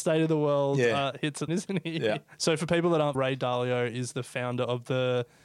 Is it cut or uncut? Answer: cut